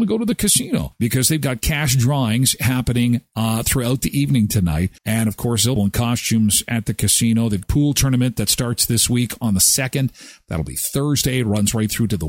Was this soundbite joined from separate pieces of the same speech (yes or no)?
yes